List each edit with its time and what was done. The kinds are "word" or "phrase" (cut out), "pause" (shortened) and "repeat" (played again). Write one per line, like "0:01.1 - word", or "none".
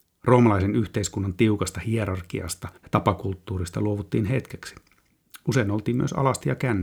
0:02.8 - pause